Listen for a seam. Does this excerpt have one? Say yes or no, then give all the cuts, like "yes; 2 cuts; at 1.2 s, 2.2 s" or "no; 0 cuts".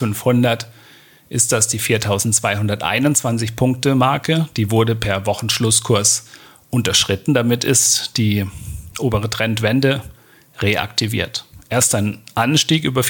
no; 0 cuts